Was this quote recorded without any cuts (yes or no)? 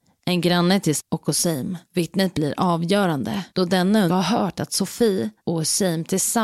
no